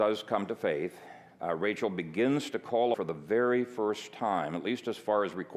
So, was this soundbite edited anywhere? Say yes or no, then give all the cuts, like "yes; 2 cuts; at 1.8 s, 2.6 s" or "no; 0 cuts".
yes; 1 cut; at 2.9 s